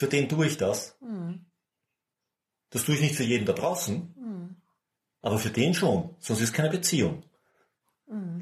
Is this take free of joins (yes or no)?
yes